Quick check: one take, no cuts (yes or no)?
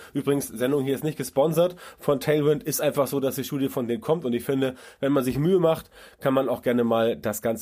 yes